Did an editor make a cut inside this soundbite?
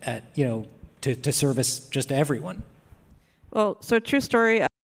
no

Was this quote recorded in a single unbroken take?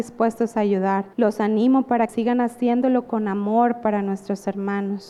no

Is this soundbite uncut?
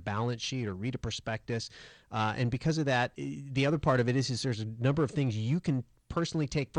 yes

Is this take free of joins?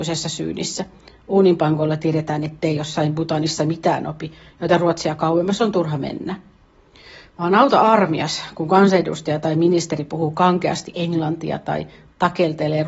yes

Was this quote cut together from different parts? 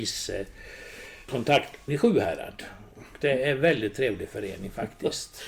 yes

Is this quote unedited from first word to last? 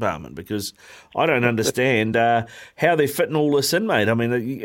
yes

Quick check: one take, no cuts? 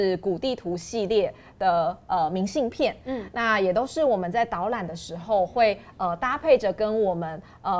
yes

